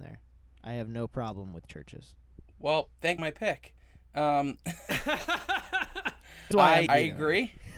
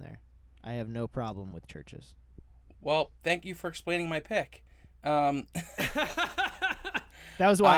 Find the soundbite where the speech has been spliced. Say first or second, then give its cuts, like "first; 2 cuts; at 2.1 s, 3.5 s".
first; 4 cuts; at 2.5 s, 3.2 s, 6.5 s, 6.9 s